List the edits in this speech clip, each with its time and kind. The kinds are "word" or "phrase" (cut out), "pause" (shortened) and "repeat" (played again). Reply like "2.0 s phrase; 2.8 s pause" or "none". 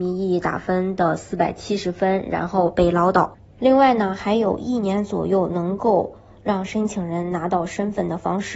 none